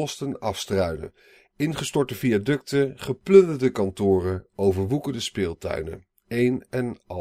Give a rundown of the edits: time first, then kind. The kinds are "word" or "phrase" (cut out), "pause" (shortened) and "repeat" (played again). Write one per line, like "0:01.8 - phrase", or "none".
none